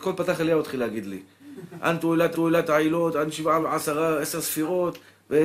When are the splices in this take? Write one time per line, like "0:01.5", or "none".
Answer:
0:02.3
0:03.6